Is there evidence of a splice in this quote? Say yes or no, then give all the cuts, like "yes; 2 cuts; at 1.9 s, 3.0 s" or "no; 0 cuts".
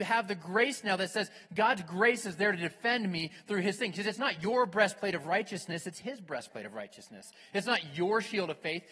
no; 0 cuts